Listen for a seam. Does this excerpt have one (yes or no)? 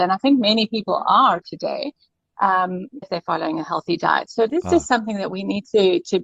yes